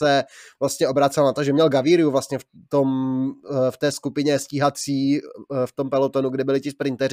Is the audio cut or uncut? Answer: uncut